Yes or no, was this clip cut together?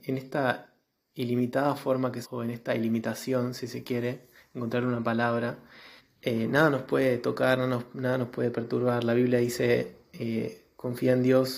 yes